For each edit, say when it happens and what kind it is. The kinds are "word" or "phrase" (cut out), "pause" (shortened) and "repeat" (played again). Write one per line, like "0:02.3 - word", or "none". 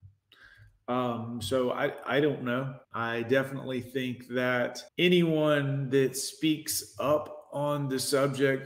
0:02.8 - pause
0:04.9 - pause